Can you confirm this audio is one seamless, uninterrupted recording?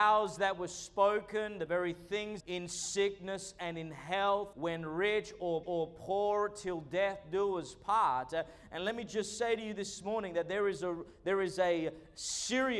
no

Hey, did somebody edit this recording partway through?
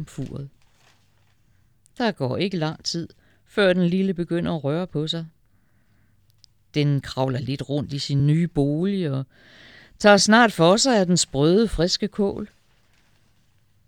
no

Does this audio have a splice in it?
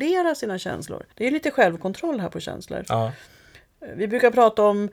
yes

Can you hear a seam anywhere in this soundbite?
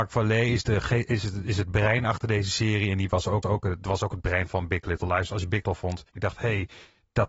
yes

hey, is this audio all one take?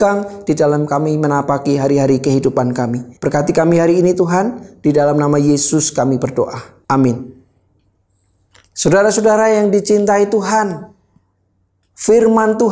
no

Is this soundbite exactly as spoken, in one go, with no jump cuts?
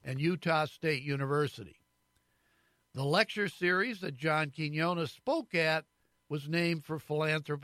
yes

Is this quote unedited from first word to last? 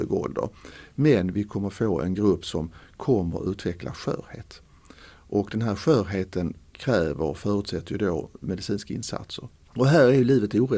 yes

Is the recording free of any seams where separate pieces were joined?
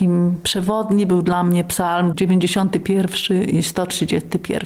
yes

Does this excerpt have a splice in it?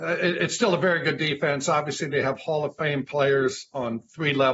no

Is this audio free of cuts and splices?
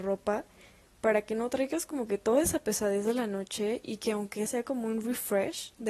no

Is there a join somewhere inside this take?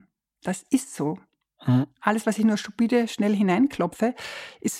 no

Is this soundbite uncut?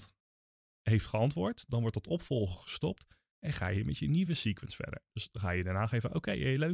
yes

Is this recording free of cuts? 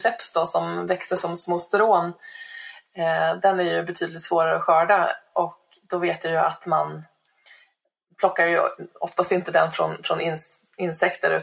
yes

